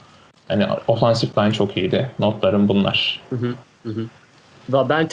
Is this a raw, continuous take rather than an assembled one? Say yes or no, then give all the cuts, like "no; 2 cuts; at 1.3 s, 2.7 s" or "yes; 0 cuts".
yes; 0 cuts